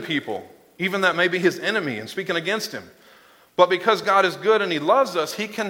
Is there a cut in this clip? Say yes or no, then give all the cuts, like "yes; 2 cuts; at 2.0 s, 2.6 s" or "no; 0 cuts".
no; 0 cuts